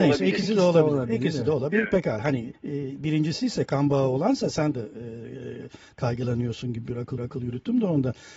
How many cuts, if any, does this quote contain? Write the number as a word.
three